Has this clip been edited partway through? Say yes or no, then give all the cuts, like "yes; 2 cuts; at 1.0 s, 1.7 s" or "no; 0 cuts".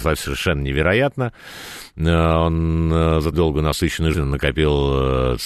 yes; 2 cuts; at 3.3 s, 4.1 s